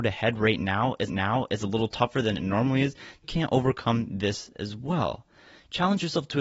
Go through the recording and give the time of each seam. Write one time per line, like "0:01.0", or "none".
0:01.1
0:03.2